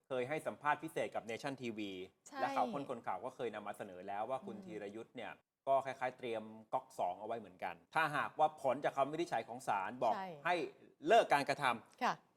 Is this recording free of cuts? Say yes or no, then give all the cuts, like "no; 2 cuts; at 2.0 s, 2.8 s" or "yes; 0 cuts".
no; 2 cuts; at 5.4 s, 7.9 s